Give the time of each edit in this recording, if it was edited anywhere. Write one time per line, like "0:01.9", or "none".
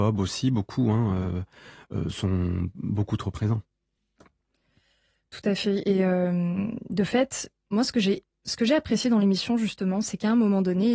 none